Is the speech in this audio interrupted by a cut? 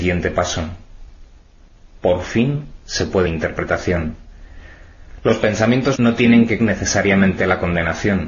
yes; 3 cuts; at 3.3 s, 5.9 s, 6.6 s

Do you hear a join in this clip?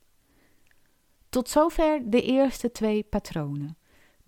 no; 0 cuts

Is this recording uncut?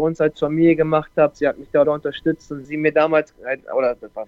no; 3 cuts; at 1.3 s, 1.8 s, 2.6 s

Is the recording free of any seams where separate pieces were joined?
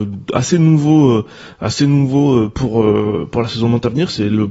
yes; 0 cuts

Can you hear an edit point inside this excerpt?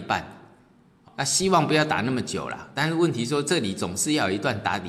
yes; 1 cut; at 1.1 s

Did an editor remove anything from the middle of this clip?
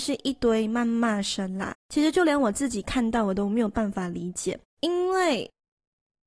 yes; 2 cuts; at 1.8 s, 4.7 s

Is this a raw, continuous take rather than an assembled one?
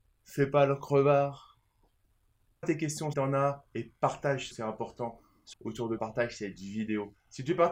no; 5 cuts; at 2.6 s, 3.1 s, 4.5 s, 5.5 s, 6.0 s

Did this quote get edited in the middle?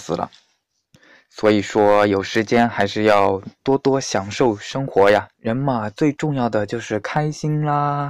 yes; 2 cuts; at 0.9 s, 5.3 s

